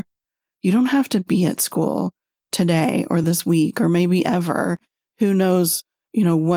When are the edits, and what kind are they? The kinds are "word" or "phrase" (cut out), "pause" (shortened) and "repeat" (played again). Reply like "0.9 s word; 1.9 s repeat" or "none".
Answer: none